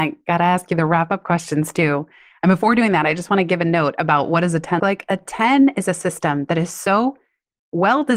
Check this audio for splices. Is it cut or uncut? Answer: cut